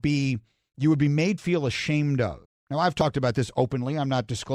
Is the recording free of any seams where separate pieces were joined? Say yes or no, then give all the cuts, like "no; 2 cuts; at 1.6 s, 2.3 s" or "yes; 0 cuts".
no; 2 cuts; at 1.4 s, 2.4 s